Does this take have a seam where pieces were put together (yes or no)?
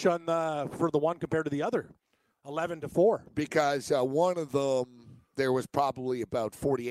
no